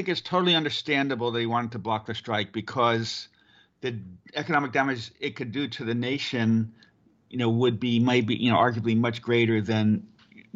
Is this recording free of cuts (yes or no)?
yes